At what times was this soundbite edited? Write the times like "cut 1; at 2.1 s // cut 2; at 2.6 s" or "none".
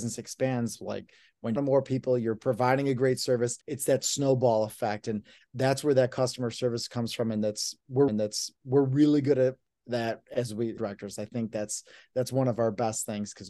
cut 1; at 1.6 s // cut 2; at 3.6 s // cut 3; at 8.1 s // cut 4; at 10.8 s